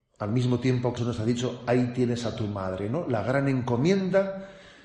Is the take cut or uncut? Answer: cut